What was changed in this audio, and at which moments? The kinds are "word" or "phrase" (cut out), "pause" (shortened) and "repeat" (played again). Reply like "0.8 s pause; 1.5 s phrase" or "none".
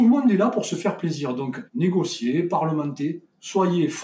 1.7 s pause

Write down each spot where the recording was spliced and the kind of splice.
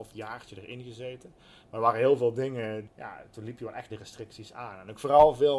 2.9 s word; 3.9 s word

